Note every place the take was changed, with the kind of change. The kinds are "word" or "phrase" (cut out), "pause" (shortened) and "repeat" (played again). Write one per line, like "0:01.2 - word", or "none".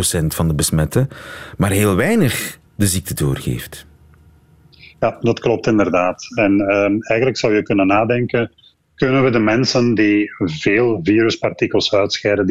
0:02.7 - pause